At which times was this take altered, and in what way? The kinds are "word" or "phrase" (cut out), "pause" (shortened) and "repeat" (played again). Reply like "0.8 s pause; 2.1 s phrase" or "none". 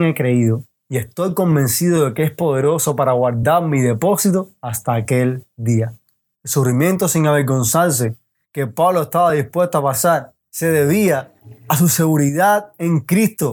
none